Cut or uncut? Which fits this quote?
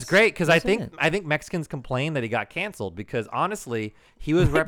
uncut